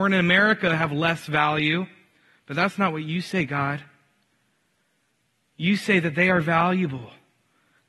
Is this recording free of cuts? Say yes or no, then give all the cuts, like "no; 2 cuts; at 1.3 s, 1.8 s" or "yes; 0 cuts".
yes; 0 cuts